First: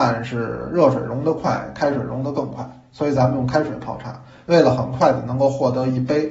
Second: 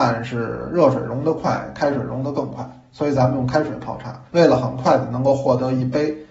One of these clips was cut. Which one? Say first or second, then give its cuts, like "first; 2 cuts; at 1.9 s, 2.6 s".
second; 1 cut; at 4.3 s